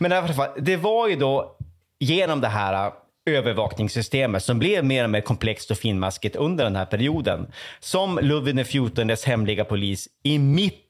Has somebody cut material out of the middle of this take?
no; 0 cuts

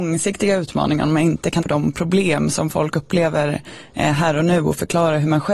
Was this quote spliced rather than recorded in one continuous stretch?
yes; 1 cut; at 1.6 s

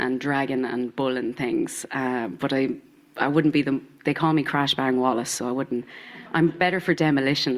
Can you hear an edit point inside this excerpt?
no; 0 cuts

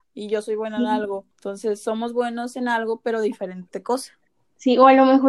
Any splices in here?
yes; 1 cut; at 1.3 s

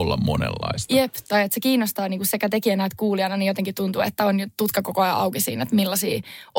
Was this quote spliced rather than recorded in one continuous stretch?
no; 0 cuts

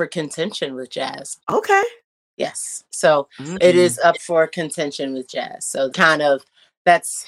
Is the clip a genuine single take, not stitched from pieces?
no; 2 cuts; at 1.4 s, 5.9 s

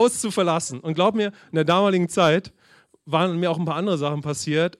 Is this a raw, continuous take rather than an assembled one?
yes; 0 cuts

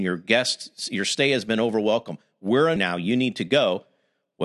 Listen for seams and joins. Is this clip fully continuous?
no; 1 cut; at 2.8 s

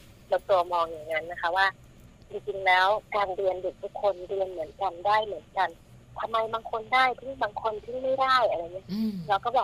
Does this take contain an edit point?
no; 0 cuts

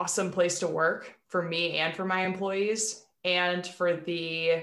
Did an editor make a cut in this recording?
no; 0 cuts

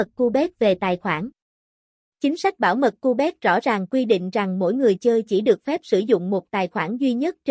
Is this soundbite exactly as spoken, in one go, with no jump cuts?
yes; 0 cuts

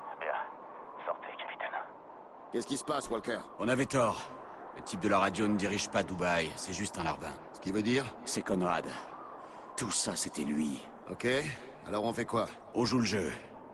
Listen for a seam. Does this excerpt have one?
no; 0 cuts

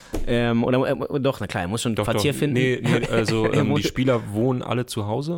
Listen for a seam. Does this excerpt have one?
no; 0 cuts

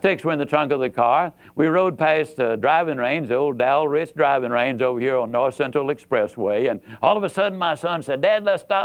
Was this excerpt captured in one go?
yes; 0 cuts

